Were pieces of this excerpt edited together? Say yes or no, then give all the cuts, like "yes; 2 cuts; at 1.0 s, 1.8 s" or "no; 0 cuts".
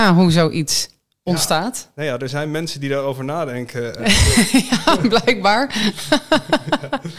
no; 0 cuts